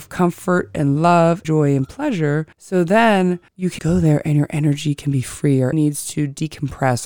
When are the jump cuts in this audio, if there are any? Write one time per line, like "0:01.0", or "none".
0:01.4
0:02.5
0:03.5
0:03.8
0:05.7